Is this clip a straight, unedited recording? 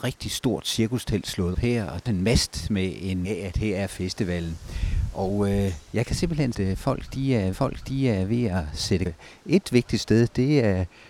no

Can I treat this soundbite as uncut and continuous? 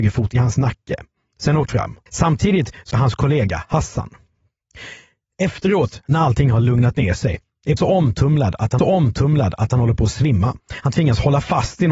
no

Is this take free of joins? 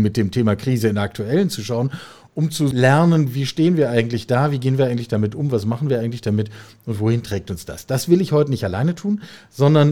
yes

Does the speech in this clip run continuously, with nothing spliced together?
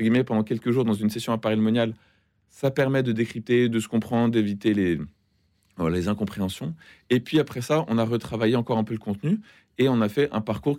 yes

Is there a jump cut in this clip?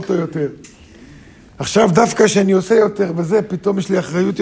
no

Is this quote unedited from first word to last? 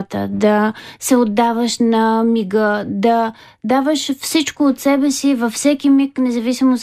yes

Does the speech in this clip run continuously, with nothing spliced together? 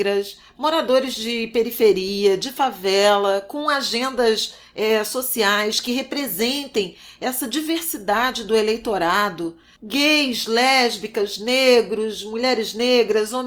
yes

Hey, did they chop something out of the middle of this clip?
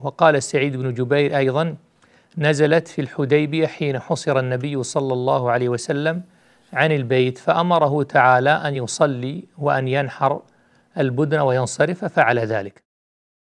no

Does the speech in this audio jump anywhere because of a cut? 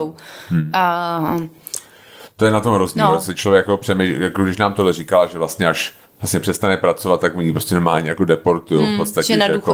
yes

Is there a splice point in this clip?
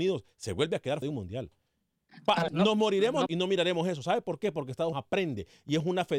yes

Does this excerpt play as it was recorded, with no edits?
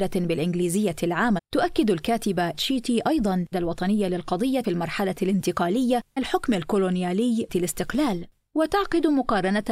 no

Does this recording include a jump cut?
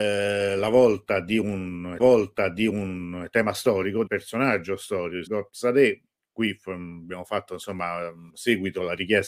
yes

